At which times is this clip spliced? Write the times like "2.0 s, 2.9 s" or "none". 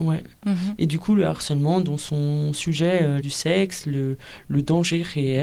3.2 s